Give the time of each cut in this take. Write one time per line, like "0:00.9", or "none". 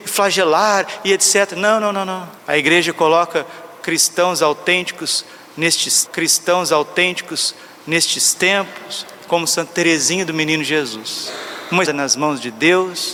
0:02.4
0:06.1
0:11.8